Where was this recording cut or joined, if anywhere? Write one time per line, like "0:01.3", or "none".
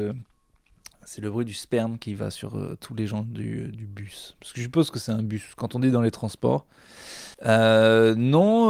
0:07.3

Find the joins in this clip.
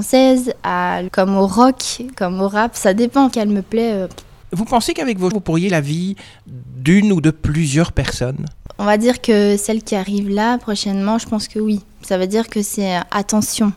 0:01.1
0:03.3
0:05.3
0:05.7

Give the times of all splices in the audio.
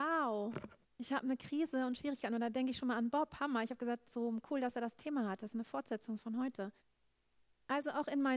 none

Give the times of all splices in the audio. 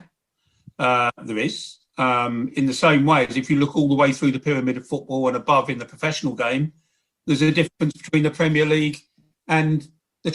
0:01.9

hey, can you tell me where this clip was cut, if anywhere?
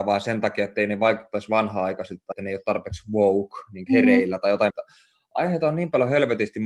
0:02.3
0:03.9
0:04.7

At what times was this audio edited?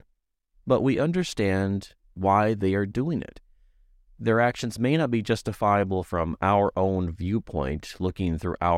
none

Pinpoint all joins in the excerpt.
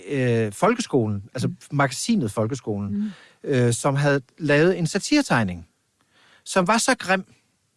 none

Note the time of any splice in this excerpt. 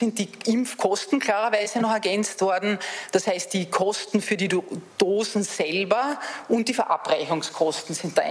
0:04.9

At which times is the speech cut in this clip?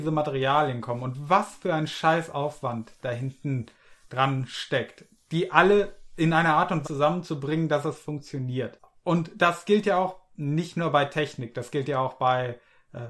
0:06.8

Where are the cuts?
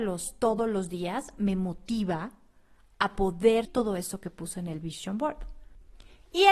0:03.6

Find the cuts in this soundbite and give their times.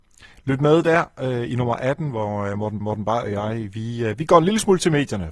0:02.8

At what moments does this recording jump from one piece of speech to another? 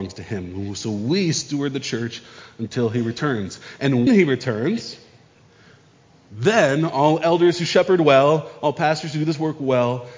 0:04.1

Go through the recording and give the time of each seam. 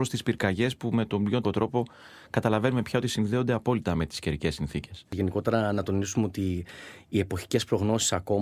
0:01.4

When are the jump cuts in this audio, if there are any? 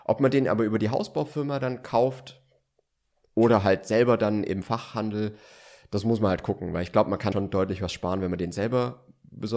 0:07.3

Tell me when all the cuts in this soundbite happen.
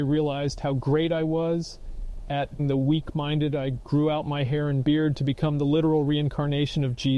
0:02.6

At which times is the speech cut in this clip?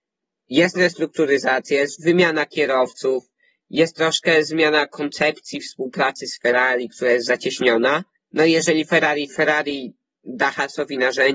0:08.1
0:09.3

